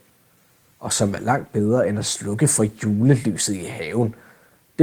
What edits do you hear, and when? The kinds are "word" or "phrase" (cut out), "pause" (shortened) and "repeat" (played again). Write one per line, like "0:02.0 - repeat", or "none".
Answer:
none